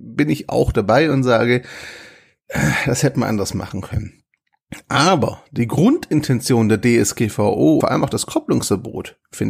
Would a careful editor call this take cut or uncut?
cut